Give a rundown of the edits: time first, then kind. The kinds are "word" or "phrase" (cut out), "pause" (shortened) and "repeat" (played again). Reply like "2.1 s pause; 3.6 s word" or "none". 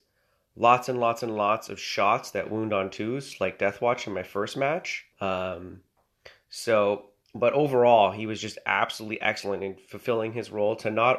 5.1 s pause; 7.2 s pause